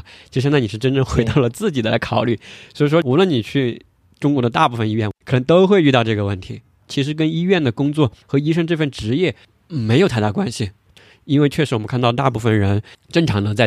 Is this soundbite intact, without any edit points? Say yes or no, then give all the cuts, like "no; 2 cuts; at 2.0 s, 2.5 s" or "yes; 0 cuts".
yes; 0 cuts